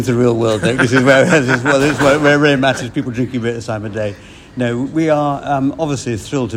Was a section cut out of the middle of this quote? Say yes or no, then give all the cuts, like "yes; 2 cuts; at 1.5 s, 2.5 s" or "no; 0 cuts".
no; 0 cuts